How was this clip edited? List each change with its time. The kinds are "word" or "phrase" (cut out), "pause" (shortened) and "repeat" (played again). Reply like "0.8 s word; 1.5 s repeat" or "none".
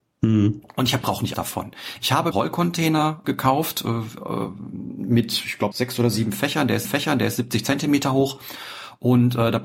1.0 s phrase; 1.3 s phrase; 2.3 s phrase; 3.2 s word; 5.7 s word; 6.8 s repeat